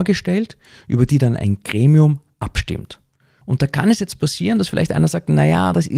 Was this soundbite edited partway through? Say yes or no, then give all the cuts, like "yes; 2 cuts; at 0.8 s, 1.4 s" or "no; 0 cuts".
no; 0 cuts